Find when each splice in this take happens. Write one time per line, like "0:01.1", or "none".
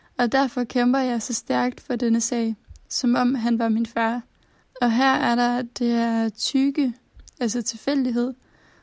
0:04.6